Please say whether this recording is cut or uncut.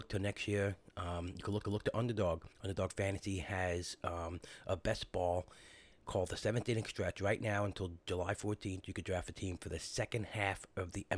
cut